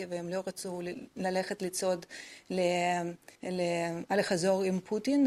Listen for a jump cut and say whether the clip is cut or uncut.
cut